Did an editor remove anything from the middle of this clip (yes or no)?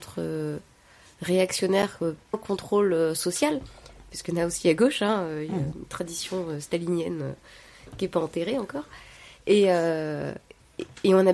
yes